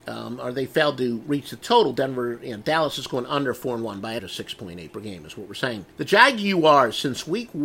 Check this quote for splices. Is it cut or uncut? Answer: cut